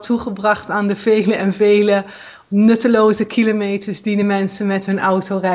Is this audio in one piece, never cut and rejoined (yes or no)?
yes